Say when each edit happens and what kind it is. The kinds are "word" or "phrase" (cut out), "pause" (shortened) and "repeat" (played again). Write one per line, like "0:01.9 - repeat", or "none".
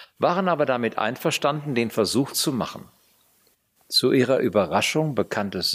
none